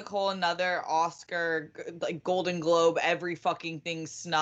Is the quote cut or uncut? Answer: uncut